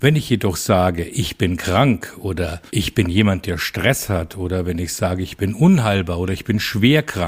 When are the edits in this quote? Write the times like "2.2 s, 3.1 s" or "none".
2.7 s